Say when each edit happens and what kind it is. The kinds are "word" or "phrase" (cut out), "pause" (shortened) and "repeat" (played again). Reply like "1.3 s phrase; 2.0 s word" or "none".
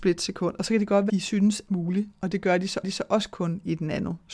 1.1 s word; 1.7 s word; 2.8 s repeat

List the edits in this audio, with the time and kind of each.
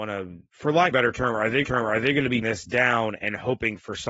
0.9 s phrase; 1.6 s repeat; 2.4 s phrase

